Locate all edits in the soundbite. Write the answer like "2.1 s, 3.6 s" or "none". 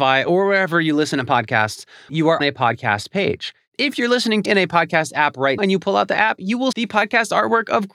2.1 s, 2.4 s, 4.4 s, 5.6 s, 6.7 s